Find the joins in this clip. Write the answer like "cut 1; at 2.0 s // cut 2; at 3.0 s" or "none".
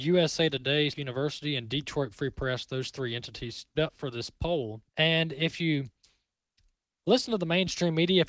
cut 1; at 0.9 s // cut 2; at 3.7 s // cut 3; at 4.9 s